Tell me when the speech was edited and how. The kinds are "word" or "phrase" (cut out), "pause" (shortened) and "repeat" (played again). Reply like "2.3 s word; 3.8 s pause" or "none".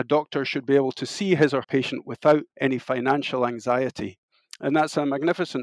1.6 s word; 2.5 s pause

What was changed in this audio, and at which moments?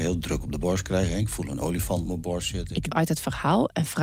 2.9 s phrase

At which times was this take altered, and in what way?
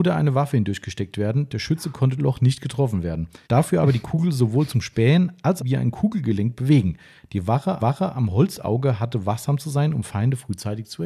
2.2 s phrase; 3.4 s pause; 5.6 s phrase; 7.8 s repeat

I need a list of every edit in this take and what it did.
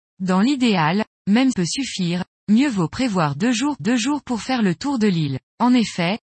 1.5 s phrase; 3.8 s repeat; 5.5 s pause

